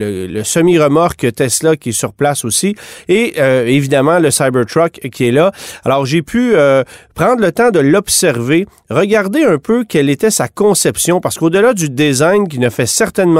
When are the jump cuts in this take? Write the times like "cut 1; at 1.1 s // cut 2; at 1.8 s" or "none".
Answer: none